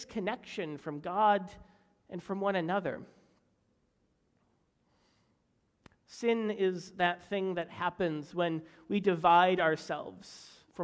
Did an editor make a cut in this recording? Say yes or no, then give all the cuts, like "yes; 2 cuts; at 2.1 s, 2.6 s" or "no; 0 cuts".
no; 0 cuts